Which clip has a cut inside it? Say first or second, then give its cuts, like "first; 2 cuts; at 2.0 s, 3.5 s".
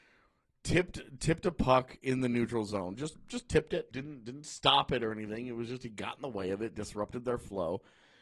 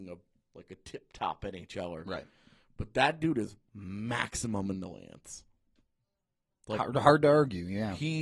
first; 1 cut; at 3.9 s